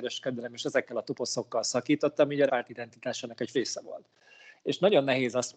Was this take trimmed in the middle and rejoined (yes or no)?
yes